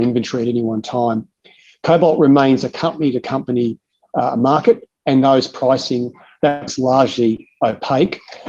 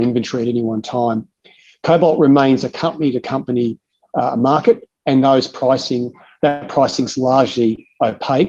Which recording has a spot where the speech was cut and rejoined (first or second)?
first